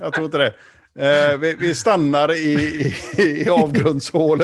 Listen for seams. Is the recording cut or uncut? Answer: uncut